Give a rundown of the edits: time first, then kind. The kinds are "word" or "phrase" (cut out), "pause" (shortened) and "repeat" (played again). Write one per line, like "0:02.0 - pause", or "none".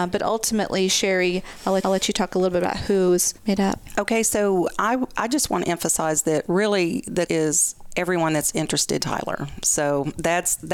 0:01.8 - repeat
0:03.4 - pause
0:07.3 - word
0:09.0 - phrase